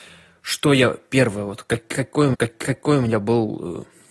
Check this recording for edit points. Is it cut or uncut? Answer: cut